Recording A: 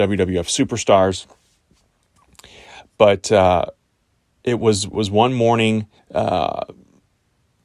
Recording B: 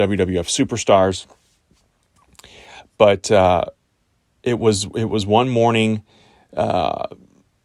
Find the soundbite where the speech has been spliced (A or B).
A